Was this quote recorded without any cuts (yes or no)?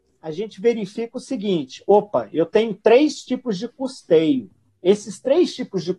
yes